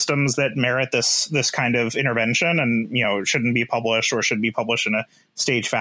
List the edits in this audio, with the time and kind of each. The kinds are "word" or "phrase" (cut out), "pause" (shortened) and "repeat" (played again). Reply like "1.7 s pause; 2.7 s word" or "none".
none